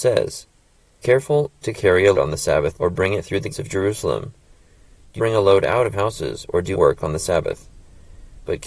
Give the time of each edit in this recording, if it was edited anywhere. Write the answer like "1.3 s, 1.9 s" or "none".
1.0 s, 1.6 s, 2.1 s, 2.8 s, 3.5 s, 5.2 s, 5.9 s, 6.7 s